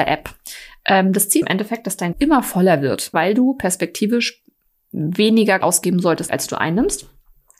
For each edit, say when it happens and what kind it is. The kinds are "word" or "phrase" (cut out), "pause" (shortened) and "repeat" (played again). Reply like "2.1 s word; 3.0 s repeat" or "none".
1.4 s word; 2.1 s word; 3.1 s word; 5.6 s word; 6.3 s word